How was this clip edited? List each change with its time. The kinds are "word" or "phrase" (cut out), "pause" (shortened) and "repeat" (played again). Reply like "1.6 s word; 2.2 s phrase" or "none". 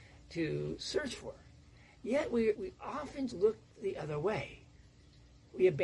2.5 s word; 3.3 s word